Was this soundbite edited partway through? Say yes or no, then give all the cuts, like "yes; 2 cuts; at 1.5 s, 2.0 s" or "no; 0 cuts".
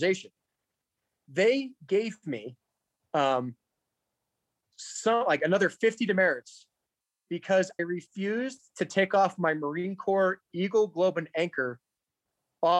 yes; 1 cut; at 7.8 s